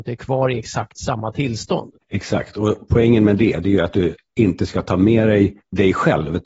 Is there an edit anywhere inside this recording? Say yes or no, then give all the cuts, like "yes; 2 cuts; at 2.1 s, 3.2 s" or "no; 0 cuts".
yes; 1 cut; at 2.0 s